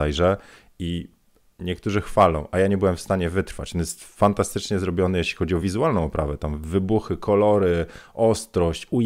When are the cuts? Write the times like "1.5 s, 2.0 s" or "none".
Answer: none